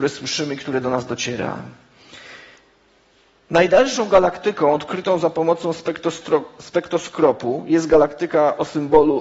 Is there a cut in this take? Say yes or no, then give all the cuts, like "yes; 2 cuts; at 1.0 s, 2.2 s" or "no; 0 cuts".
no; 0 cuts